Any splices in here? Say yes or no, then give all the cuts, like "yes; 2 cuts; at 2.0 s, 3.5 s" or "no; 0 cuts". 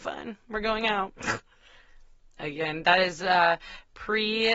no; 0 cuts